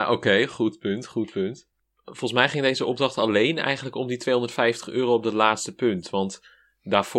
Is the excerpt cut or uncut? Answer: uncut